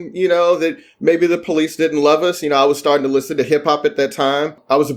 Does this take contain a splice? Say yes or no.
no